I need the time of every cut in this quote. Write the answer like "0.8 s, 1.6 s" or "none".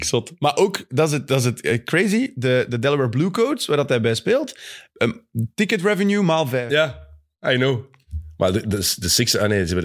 none